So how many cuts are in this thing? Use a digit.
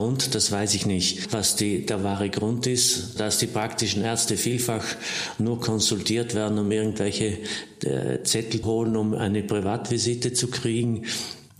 2